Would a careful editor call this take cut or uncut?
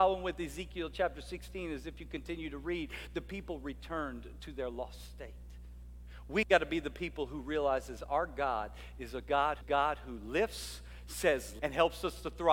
cut